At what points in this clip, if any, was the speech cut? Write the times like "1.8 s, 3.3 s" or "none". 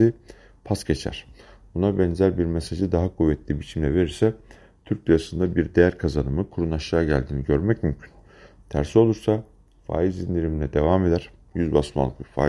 none

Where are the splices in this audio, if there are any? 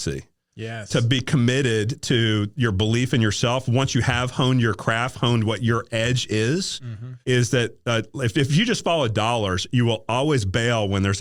7.2 s

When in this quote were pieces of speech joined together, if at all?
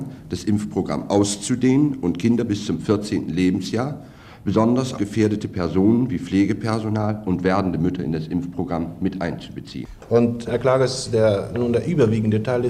4.9 s, 10.5 s, 11.5 s

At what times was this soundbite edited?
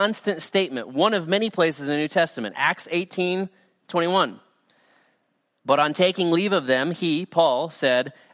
none

